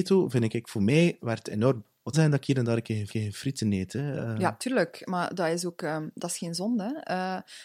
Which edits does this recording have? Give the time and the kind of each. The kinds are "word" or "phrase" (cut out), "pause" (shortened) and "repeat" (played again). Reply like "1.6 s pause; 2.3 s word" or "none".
1.2 s word; 2.1 s phrase; 3.1 s repeat

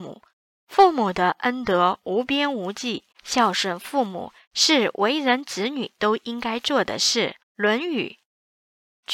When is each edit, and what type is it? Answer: 3.1 s pause; 7.4 s pause

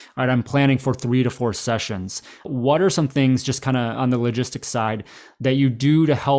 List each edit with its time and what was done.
2.4 s word

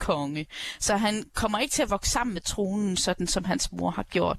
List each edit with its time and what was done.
none

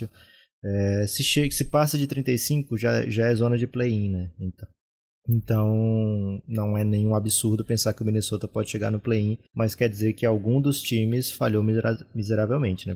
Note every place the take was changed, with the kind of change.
9.5 s pause

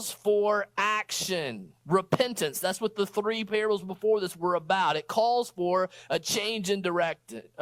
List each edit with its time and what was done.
1.8 s pause

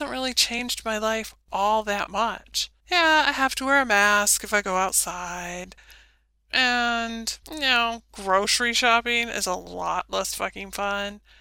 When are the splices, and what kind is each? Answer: 2.8 s pause; 7.4 s pause

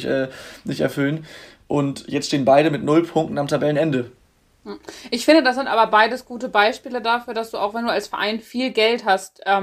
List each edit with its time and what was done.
none

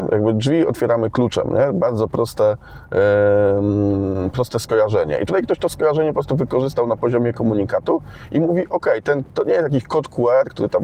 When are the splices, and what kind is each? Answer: none

